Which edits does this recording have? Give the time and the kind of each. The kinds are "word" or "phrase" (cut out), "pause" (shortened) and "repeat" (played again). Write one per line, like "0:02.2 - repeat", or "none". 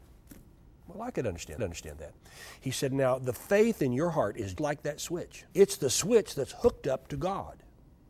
0:01.6 - repeat
0:04.6 - word
0:05.5 - pause